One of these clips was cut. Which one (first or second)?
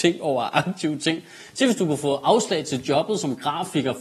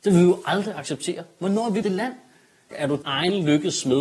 second